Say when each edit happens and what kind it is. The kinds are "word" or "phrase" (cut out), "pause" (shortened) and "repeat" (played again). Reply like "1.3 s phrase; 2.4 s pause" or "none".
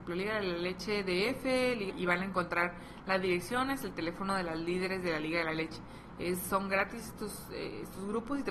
1.9 s phrase